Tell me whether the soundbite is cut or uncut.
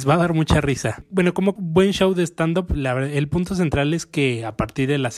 cut